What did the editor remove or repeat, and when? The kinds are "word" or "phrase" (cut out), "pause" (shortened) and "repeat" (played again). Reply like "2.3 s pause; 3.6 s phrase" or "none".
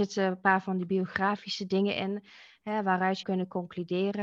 3.2 s word